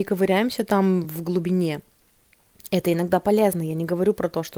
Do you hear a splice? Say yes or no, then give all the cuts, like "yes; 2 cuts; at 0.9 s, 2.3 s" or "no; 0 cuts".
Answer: no; 0 cuts